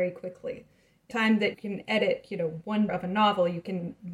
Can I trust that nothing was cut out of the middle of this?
no; 3 cuts; at 1.1 s, 1.5 s, 2.9 s

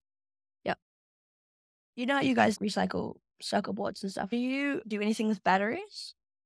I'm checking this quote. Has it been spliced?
yes; 2 cuts; at 2.5 s, 4.8 s

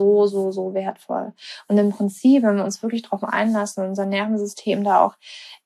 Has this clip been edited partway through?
no; 0 cuts

